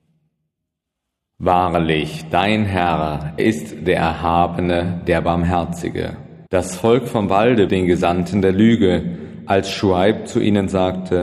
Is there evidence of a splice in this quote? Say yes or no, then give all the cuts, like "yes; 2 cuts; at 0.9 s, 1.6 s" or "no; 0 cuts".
yes; 3 cuts; at 3.4 s, 6.5 s, 7.7 s